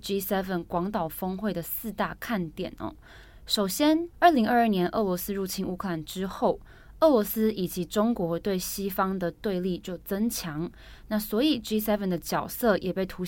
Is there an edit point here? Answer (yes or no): yes